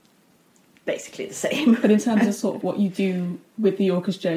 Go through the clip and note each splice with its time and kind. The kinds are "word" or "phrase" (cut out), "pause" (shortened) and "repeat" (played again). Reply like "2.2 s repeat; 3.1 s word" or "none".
2.6 s word